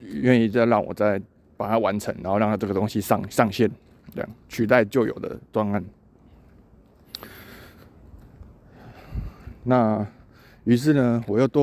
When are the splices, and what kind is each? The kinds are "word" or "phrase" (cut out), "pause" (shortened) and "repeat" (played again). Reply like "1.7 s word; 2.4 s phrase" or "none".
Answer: none